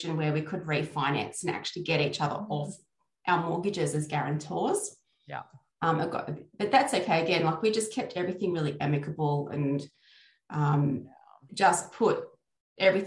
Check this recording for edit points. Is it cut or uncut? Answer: uncut